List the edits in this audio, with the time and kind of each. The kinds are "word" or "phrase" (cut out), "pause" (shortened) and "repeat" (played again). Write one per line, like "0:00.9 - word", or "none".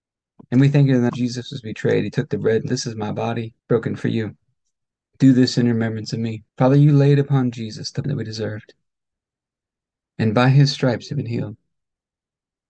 0:01.1 - word
0:02.7 - word
0:03.6 - pause
0:04.9 - pause
0:06.5 - pause
0:08.0 - word